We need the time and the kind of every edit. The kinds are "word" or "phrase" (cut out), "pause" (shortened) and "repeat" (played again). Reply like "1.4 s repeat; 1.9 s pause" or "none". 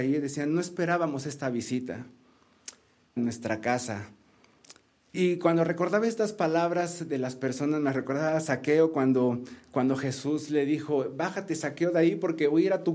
3.2 s phrase; 5.1 s word